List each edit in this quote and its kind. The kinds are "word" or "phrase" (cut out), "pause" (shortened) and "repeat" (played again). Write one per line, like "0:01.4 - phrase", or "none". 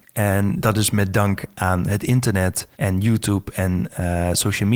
0:02.7 - pause